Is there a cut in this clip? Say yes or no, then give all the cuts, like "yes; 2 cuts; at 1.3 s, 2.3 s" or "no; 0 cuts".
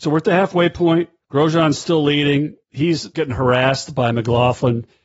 yes; 1 cut; at 2.6 s